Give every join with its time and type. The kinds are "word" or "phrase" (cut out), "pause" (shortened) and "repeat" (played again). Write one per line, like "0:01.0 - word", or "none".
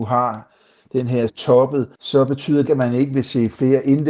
0:01.3 - word
0:01.9 - pause
0:02.7 - word